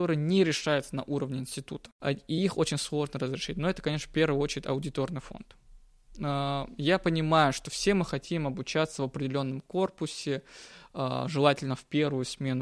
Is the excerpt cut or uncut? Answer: uncut